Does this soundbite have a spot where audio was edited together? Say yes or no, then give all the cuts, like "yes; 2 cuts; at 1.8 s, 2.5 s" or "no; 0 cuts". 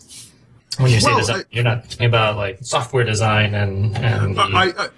yes; 1 cut; at 2.0 s